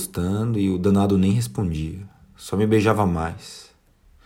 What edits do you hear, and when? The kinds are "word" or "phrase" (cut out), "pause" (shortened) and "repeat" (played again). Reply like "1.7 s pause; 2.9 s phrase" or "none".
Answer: none